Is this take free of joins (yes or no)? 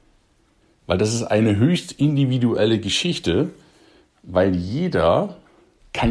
yes